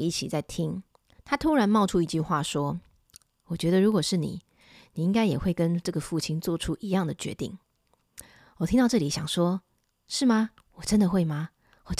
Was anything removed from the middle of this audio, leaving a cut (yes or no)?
no